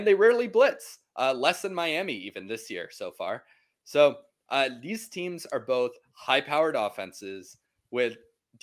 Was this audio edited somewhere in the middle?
no; 0 cuts

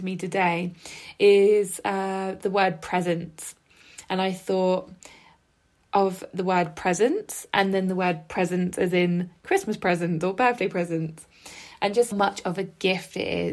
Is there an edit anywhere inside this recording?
yes; 1 cut; at 12.1 s

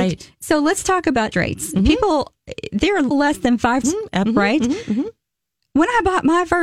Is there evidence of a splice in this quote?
yes; 4 cuts; at 1.3 s, 3.1 s, 3.8 s, 4.2 s

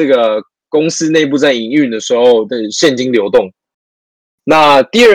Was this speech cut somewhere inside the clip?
no; 0 cuts

